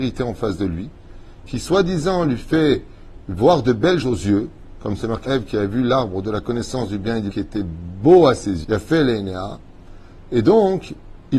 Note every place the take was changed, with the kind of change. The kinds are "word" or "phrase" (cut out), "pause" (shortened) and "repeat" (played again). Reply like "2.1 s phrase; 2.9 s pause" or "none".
4.0 s word; 5.2 s word; 7.3 s word; 8.6 s word